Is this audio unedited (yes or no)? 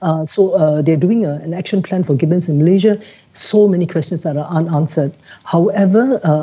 yes